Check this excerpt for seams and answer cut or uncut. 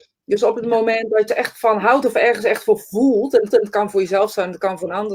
cut